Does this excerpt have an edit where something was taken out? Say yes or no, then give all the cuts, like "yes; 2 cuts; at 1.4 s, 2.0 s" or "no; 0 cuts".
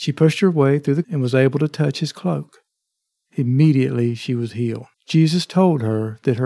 yes; 2 cuts; at 1.0 s, 4.9 s